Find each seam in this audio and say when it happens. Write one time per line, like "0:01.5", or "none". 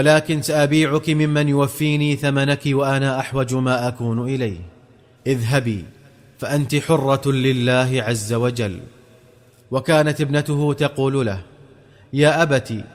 none

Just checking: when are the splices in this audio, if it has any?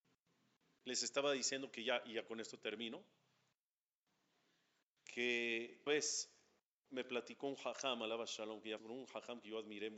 0:05.9
0:08.8

